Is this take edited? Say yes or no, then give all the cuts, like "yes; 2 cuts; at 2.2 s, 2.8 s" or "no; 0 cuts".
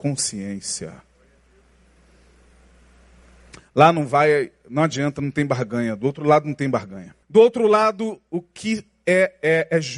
yes; 1 cut; at 7.2 s